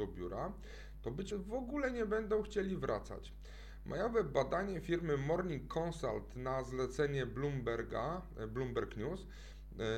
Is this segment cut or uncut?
cut